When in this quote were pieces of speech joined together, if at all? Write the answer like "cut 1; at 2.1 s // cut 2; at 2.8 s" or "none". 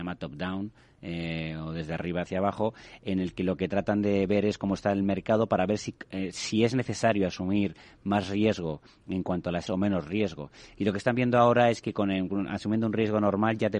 cut 1; at 6.3 s // cut 2; at 9.7 s